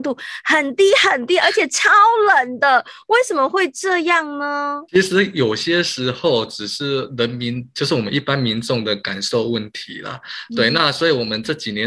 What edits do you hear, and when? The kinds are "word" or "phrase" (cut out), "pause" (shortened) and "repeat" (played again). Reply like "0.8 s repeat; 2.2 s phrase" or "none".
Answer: 4.9 s pause